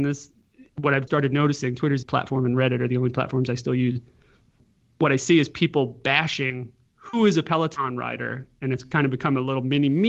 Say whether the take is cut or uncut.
cut